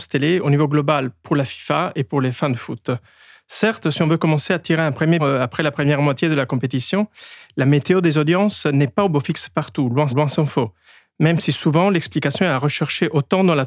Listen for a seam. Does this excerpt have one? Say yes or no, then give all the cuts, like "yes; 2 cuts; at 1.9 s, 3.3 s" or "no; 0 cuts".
yes; 2 cuts; at 5.2 s, 10.1 s